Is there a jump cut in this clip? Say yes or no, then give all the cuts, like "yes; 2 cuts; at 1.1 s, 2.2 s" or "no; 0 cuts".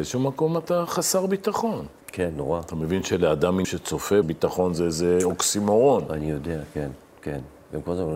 yes; 2 cuts; at 3.6 s, 4.2 s